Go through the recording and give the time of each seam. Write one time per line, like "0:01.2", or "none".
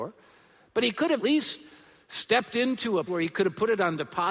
0:01.2
0:03.1